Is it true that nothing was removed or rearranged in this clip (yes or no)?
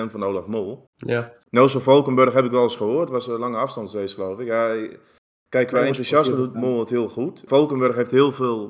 yes